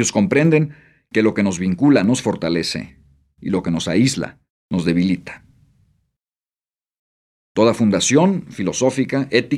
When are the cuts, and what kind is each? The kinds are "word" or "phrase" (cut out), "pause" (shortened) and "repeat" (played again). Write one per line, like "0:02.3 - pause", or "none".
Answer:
none